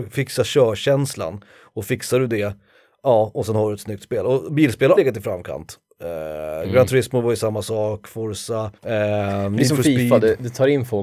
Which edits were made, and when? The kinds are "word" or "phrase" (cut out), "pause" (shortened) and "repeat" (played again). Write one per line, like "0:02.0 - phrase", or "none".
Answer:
0:05.0 - word
0:08.8 - pause